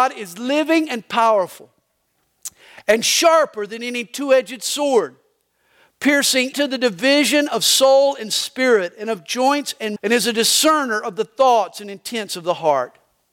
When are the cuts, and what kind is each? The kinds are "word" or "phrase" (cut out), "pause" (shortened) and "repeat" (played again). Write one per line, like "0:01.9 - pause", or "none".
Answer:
0:06.5 - word
0:10.0 - word